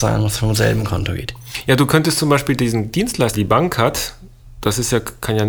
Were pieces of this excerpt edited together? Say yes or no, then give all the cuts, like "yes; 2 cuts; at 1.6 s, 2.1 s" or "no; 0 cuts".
yes; 1 cut; at 3.3 s